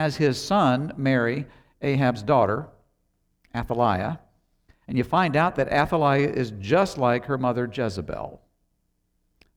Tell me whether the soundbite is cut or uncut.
uncut